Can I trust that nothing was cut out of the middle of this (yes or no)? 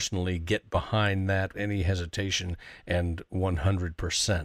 no